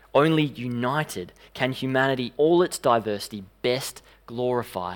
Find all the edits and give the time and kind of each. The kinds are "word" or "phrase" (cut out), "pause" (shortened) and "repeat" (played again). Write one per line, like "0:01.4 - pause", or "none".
0:02.3 - word